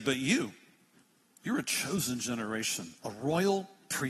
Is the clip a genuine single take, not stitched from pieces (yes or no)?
no